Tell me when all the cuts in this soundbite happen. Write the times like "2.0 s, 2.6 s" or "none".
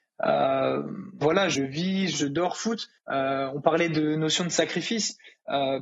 1.2 s, 2.1 s, 3.0 s